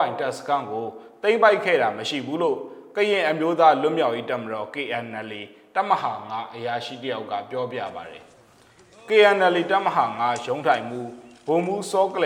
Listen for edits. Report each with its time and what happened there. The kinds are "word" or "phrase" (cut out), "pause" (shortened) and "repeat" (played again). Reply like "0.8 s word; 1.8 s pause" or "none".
none